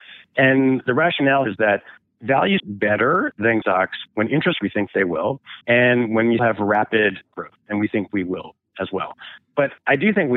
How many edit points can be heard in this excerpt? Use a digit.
8